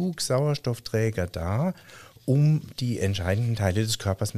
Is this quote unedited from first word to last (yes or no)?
yes